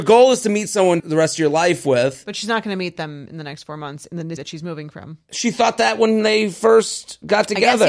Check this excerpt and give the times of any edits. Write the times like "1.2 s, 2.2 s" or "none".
1.0 s, 4.4 s